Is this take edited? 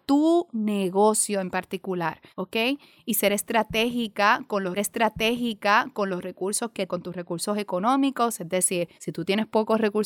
yes; 4 cuts; at 2.3 s, 4.8 s, 6.9 s, 8.9 s

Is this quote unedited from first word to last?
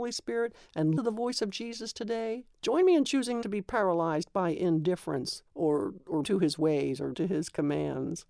no; 6 cuts; at 1.0 s, 2.5 s, 3.4 s, 5.5 s, 6.2 s, 7.1 s

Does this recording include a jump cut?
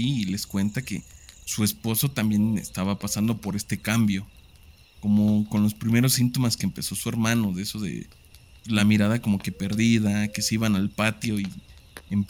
no; 0 cuts

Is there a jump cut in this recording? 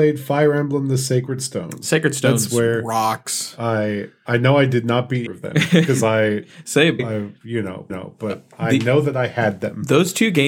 yes; 3 cuts; at 5.3 s, 7.0 s, 7.9 s

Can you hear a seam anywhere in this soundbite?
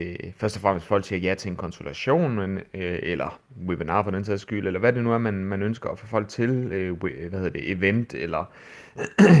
no; 0 cuts

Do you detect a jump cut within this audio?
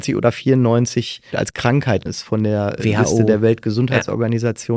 yes; 2 cuts; at 1.3 s, 2.1 s

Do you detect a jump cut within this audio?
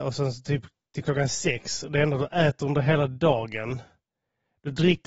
no; 0 cuts

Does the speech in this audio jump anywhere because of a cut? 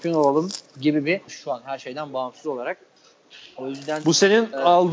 yes; 1 cut; at 1.3 s

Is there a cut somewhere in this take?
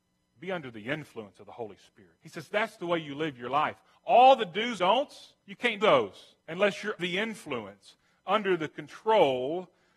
yes; 6 cuts; at 2.2 s, 4.8 s, 5.4 s, 5.8 s, 6.4 s, 7.0 s

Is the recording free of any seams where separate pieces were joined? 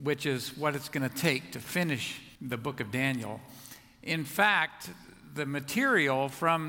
no; 1 cut; at 2.4 s

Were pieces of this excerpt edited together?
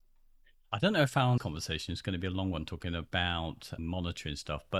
yes; 2 cuts; at 1.4 s, 3.8 s

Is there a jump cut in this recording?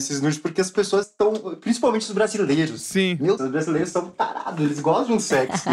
yes; 2 cuts; at 1.0 s, 3.4 s

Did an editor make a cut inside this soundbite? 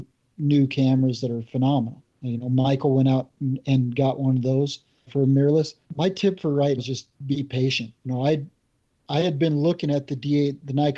yes; 6 cuts; at 2.1 s, 5.1 s, 5.8 s, 6.8 s, 7.1 s, 8.0 s

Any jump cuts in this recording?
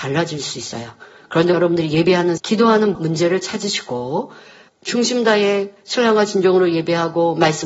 yes; 4 cuts; at 1.5 s, 2.4 s, 2.9 s, 4.7 s

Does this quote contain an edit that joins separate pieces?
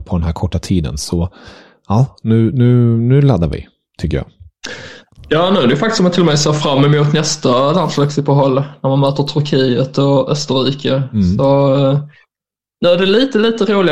no; 0 cuts

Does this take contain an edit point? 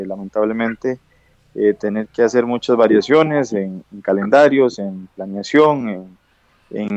no; 0 cuts

